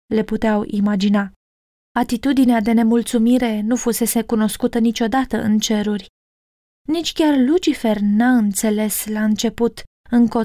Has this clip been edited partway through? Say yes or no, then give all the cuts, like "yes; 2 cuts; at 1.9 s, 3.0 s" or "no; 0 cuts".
no; 0 cuts